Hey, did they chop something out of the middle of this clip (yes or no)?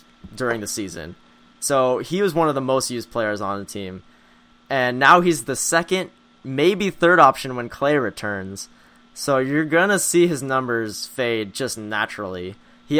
no